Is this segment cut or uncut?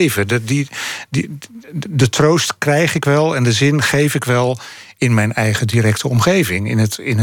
uncut